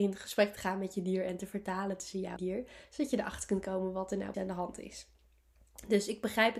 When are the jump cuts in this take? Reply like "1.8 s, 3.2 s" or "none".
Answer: 2.4 s, 4.3 s